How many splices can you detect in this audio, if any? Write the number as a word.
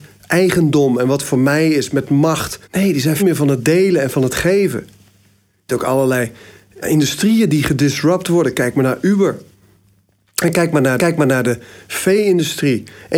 five